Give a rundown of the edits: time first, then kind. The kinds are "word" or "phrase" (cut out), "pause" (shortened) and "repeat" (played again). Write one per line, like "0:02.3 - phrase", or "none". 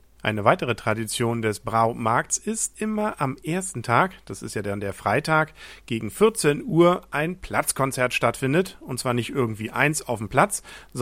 0:02.7 - word